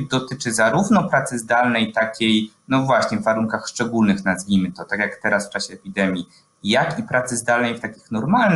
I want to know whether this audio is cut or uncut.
uncut